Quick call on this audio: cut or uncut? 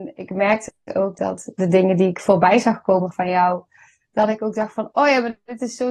uncut